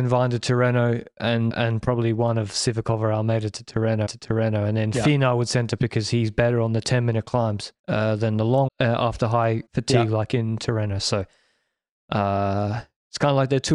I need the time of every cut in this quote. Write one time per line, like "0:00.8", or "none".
0:01.5
0:04.1
0:05.8
0:07.8
0:08.7
0:09.7